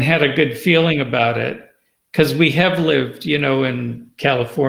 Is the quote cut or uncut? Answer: uncut